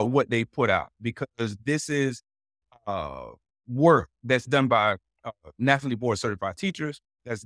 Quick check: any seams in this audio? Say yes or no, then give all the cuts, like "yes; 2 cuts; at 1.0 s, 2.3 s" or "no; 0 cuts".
no; 0 cuts